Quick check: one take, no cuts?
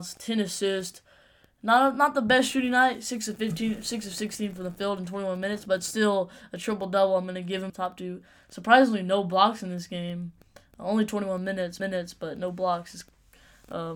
no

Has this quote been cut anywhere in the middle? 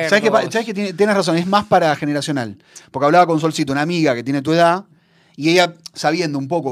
no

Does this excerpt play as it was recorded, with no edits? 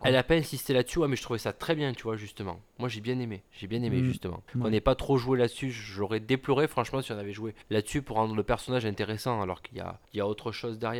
no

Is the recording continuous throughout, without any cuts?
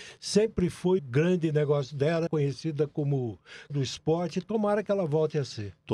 no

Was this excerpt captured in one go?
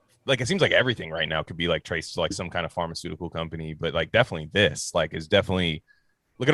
yes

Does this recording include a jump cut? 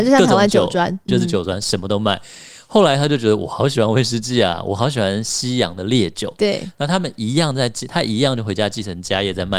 yes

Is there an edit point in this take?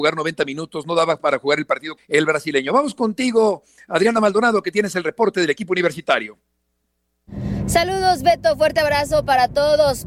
yes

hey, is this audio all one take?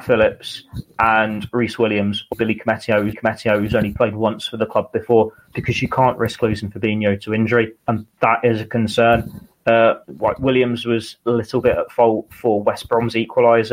no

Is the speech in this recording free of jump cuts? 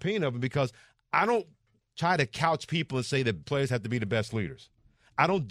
no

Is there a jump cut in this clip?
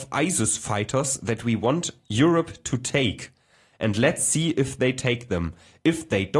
no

